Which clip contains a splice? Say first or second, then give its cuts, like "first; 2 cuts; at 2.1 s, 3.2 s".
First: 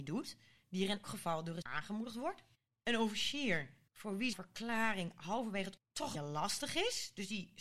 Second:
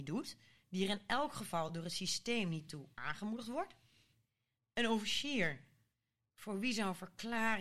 first; 7 cuts; at 1.0 s, 1.6 s, 2.5 s, 3.9 s, 4.3 s, 5.8 s, 6.1 s